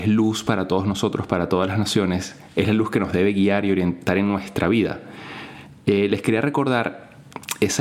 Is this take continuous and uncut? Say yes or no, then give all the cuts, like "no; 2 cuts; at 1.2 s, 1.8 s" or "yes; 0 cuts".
yes; 0 cuts